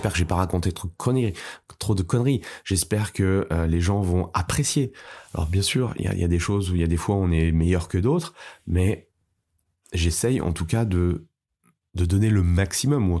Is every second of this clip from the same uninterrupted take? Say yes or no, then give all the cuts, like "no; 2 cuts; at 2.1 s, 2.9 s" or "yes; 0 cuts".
yes; 0 cuts